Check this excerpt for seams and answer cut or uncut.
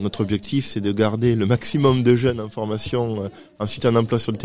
uncut